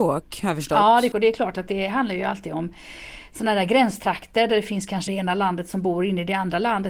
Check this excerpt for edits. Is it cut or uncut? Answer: cut